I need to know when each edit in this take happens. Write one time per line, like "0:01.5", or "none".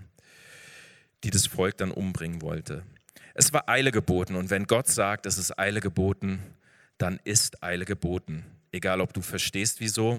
none